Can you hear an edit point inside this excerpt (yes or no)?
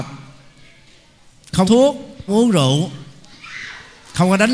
yes